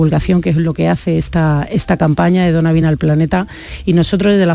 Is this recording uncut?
yes; 0 cuts

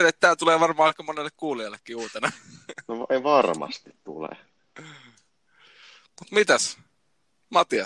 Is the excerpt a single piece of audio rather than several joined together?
yes; 0 cuts

